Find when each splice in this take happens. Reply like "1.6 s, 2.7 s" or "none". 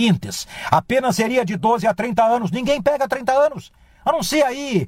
none